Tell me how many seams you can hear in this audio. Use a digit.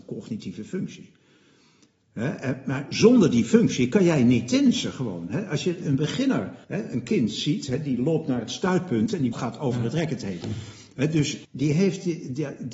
3